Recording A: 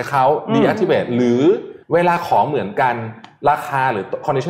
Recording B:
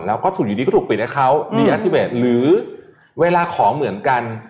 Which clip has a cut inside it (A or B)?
A